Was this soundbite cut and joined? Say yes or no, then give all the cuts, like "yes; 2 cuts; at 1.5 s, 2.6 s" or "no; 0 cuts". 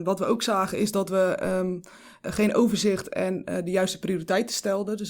no; 0 cuts